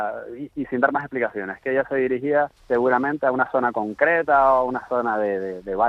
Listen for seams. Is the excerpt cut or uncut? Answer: cut